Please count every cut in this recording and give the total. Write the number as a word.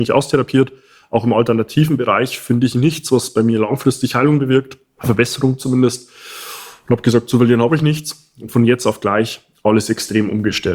zero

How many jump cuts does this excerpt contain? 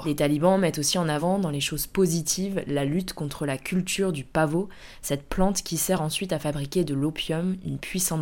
zero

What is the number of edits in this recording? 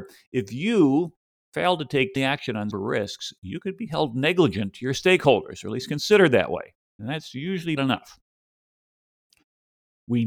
three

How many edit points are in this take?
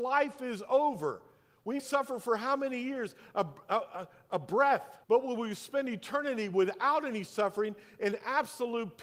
two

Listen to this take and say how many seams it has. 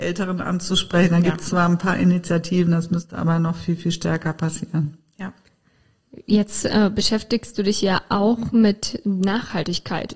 zero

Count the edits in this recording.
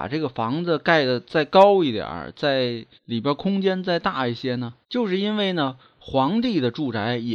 two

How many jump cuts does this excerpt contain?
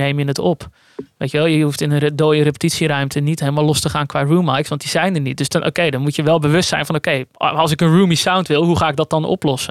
zero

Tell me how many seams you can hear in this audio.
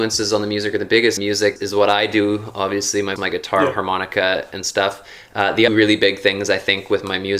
four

